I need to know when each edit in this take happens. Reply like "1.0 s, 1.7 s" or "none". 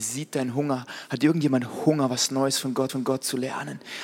2.9 s